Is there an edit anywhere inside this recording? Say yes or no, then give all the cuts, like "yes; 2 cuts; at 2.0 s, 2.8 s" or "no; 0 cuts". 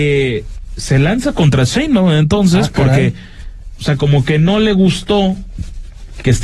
no; 0 cuts